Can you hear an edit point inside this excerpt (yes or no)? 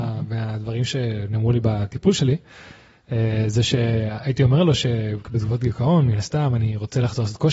no